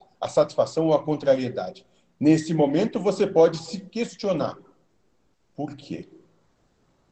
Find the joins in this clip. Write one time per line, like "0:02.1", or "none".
none